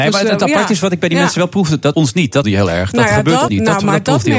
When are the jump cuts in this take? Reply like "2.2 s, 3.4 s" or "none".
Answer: 1.9 s, 2.4 s, 3.5 s